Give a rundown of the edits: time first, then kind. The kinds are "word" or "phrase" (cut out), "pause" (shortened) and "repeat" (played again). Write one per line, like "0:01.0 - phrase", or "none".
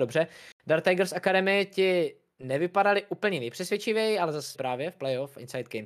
0:04.5 - word